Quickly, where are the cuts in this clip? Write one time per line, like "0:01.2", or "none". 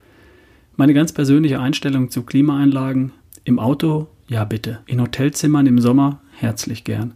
0:03.2
0:04.8